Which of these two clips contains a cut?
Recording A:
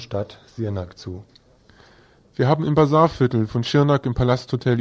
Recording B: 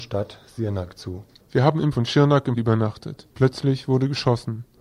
B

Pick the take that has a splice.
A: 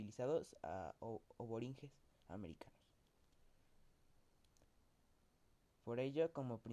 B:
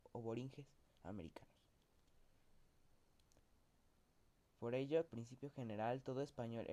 B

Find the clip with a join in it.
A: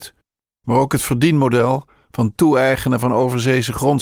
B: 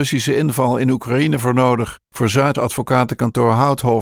B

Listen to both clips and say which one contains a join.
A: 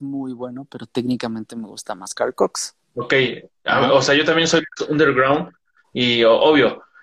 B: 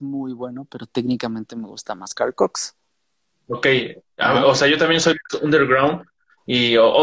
A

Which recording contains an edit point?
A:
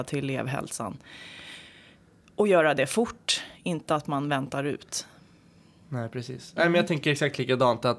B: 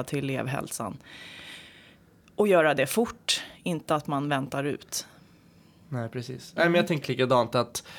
B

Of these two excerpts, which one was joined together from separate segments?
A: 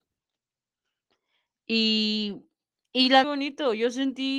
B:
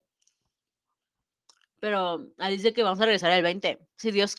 A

